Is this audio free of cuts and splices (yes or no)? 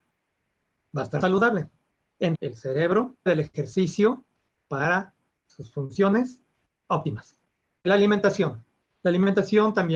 no